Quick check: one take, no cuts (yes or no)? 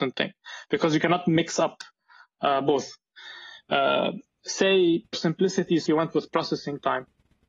no